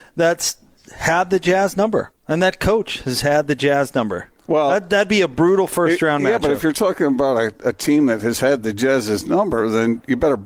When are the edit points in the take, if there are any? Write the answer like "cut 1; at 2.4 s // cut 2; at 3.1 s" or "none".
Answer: cut 1; at 2.2 s // cut 2; at 4.4 s